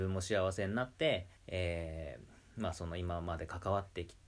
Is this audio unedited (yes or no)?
no